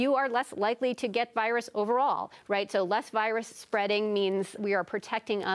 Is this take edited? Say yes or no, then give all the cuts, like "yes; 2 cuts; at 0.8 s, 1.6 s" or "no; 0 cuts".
yes; 2 cuts; at 1.3 s, 4.6 s